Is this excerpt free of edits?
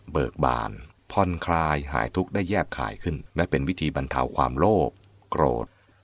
no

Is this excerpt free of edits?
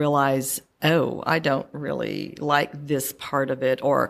yes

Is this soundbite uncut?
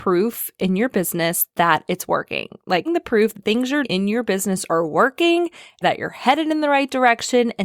no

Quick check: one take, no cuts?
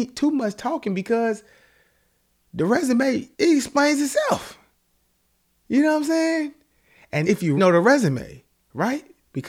no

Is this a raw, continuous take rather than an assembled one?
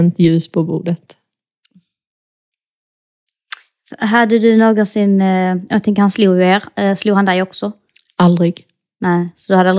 yes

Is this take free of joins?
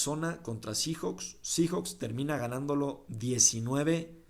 yes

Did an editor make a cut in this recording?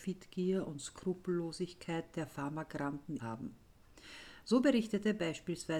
yes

